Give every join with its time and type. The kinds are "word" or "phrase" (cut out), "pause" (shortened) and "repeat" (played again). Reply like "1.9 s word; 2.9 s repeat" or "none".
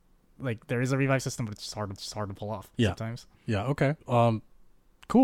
2.0 s repeat; 2.7 s pause; 4.0 s pause